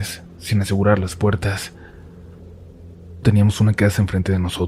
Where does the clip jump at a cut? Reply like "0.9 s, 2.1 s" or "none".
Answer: 3.2 s